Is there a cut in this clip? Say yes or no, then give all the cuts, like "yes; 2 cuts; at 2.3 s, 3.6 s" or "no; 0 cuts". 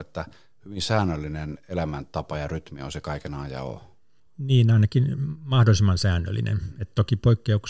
no; 0 cuts